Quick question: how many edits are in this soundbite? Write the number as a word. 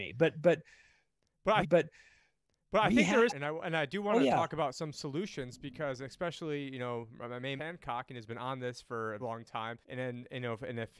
five